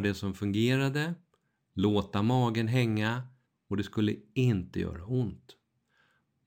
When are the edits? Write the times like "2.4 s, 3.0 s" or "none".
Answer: 3.5 s